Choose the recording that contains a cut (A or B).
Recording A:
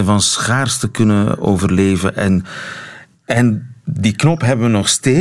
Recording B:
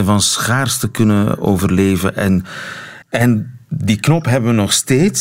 B